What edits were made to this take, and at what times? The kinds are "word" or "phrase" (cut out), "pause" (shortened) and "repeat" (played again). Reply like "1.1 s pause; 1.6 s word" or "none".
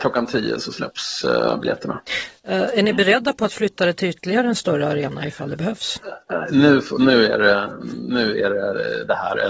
none